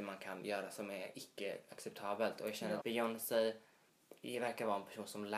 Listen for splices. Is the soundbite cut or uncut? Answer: cut